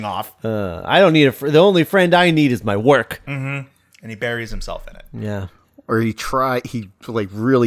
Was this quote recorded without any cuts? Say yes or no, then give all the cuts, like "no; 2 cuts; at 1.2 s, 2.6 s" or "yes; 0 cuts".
yes; 0 cuts